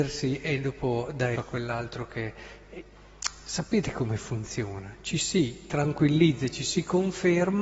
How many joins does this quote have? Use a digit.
1